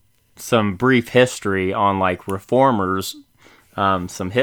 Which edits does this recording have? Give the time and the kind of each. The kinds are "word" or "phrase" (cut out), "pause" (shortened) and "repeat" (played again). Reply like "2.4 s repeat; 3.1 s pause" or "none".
none